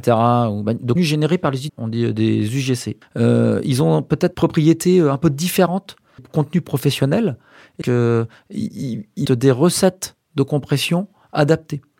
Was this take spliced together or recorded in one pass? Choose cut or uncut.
cut